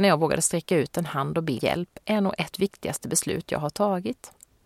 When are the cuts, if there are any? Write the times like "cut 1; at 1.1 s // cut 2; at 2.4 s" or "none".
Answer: cut 1; at 1.6 s // cut 2; at 2.5 s

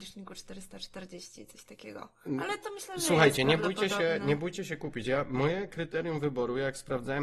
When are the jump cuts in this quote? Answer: none

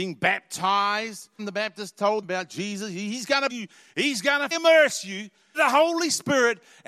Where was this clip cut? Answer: cut 1; at 1.4 s // cut 2; at 2.2 s // cut 3; at 3.5 s // cut 4; at 4.5 s // cut 5; at 5.5 s

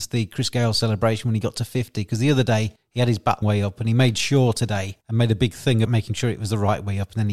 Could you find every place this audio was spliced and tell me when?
cut 1; at 3.4 s // cut 2; at 5.0 s // cut 3; at 5.8 s

